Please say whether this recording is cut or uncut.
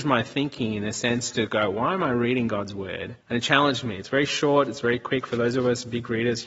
cut